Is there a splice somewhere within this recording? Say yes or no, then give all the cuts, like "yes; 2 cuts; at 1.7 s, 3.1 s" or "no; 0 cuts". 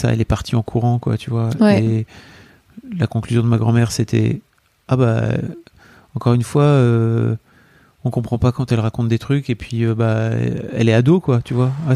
no; 0 cuts